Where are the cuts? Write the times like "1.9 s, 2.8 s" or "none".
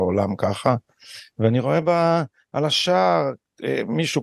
none

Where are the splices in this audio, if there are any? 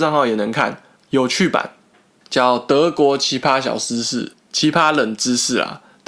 none

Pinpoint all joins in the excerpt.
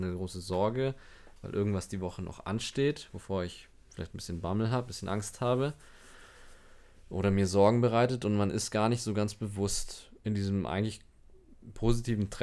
10.2 s

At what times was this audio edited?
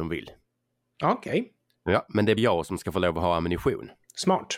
2.4 s

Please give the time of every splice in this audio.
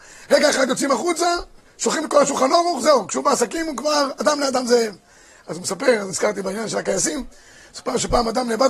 6.1 s

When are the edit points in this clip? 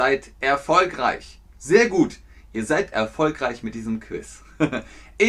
1.5 s, 2.9 s

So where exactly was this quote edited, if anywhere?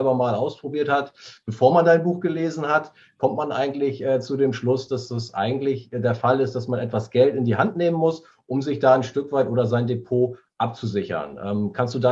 none

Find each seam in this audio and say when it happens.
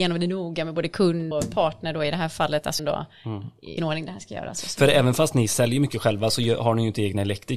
1.3 s, 2.8 s, 3.8 s

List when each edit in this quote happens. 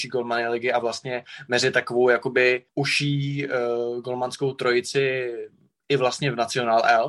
2.7 s

